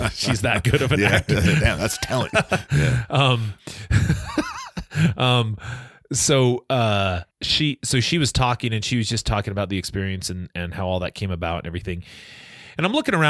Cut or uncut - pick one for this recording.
cut